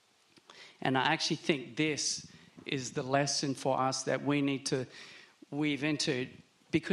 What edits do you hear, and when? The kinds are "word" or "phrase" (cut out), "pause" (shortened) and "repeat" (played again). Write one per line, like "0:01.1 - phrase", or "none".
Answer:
none